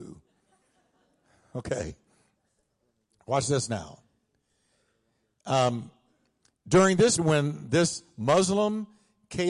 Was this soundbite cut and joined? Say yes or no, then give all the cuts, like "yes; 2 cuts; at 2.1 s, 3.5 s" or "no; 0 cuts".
yes; 1 cut; at 7.2 s